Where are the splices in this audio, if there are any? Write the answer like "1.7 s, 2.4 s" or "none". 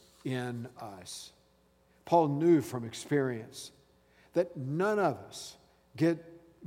none